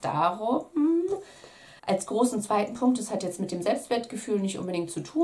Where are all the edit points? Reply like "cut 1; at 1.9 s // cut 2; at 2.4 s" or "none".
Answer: cut 1; at 1.8 s

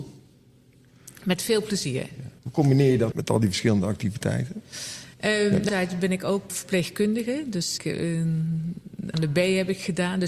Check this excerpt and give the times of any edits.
cut 1; at 2.4 s // cut 2; at 3.1 s // cut 3; at 5.1 s // cut 4; at 5.7 s // cut 5; at 6.5 s // cut 6; at 7.8 s // cut 7; at 9.1 s

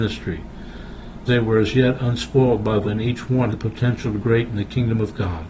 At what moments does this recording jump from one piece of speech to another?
cut 1; at 1.3 s // cut 2; at 2.8 s // cut 3; at 3.5 s // cut 4; at 4.2 s

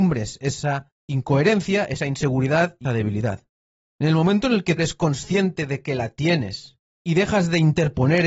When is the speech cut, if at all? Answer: cut 1; at 1.0 s // cut 2; at 2.8 s // cut 3; at 4.8 s // cut 4; at 6.9 s

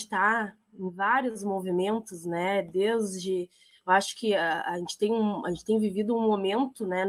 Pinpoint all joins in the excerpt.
none

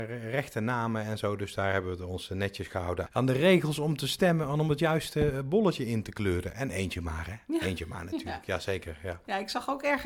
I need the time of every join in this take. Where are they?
cut 1; at 3.1 s

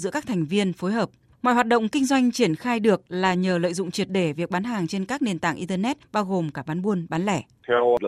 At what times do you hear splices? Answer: none

